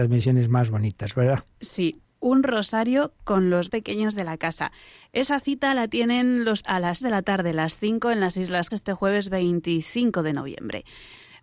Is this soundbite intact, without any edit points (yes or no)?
no